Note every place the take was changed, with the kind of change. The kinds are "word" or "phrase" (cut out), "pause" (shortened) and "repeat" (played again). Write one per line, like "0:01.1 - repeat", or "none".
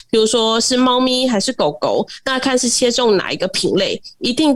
none